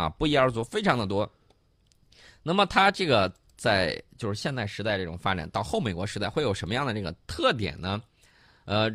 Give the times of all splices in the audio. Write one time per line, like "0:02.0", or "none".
none